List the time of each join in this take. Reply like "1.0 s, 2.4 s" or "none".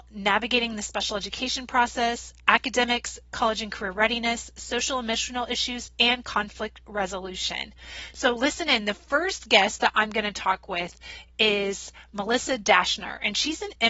none